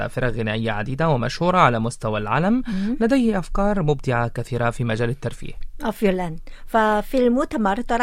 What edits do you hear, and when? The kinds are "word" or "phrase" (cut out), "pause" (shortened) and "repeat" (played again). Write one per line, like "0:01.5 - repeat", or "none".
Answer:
none